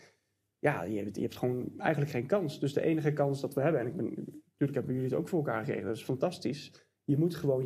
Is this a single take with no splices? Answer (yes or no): yes